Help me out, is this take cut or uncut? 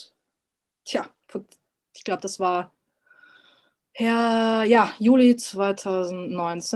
uncut